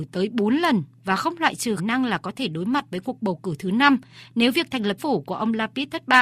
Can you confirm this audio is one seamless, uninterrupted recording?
no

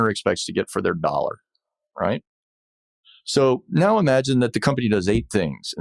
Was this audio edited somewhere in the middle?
no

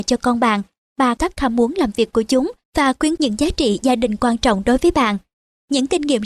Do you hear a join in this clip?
yes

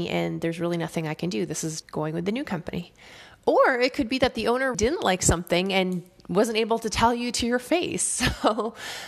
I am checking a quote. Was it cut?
yes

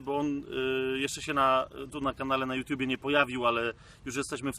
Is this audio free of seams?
yes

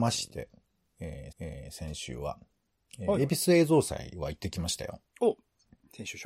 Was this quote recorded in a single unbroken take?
no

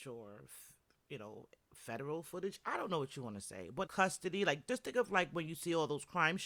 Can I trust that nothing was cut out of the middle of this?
no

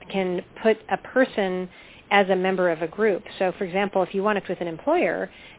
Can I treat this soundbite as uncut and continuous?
no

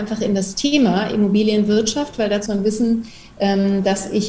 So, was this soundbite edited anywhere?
yes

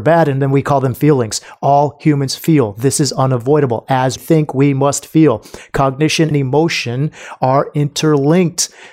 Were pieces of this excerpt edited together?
yes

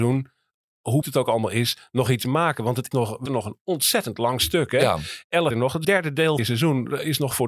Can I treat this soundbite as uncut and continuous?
no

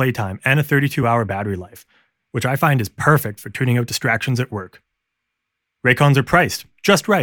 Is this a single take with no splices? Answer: yes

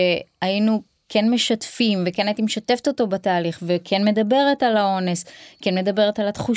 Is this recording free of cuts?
yes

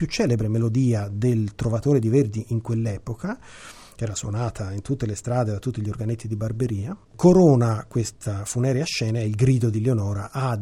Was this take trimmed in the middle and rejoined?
yes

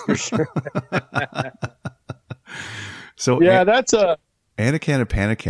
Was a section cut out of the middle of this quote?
no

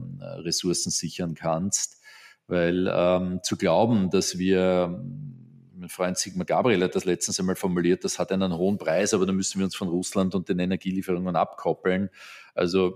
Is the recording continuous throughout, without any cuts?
yes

